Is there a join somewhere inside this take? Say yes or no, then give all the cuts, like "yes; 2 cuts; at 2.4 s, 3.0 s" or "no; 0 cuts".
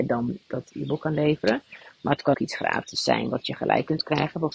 yes; 1 cut; at 2.3 s